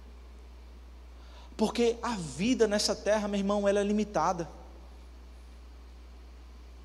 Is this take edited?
no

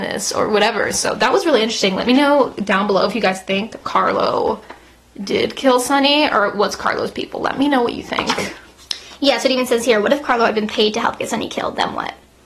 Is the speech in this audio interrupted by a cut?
no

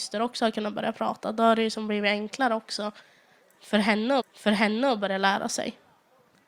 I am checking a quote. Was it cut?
yes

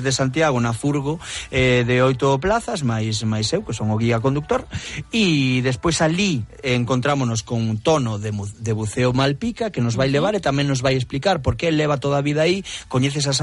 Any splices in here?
no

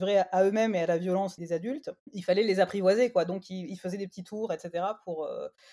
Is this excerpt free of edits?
no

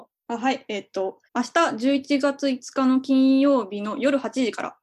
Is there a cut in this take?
yes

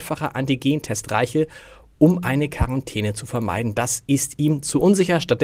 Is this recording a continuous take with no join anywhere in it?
yes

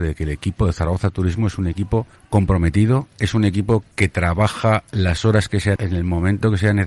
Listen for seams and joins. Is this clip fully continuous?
no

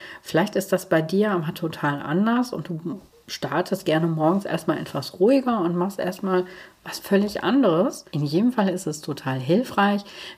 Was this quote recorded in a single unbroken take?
no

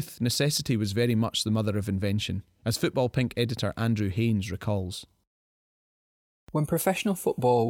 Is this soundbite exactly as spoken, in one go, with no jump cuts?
yes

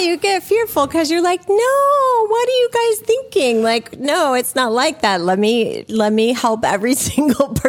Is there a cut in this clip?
no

